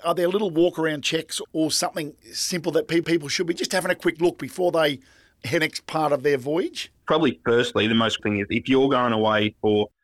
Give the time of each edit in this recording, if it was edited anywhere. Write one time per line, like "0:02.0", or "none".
0:01.4
0:02.2
0:03.0
0:05.6
0:07.0
0:08.2